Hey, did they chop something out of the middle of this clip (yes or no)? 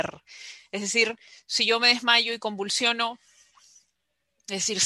no